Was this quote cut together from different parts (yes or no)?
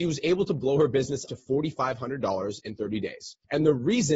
yes